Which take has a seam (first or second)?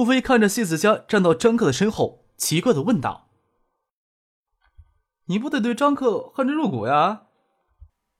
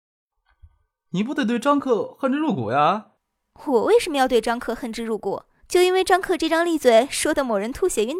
second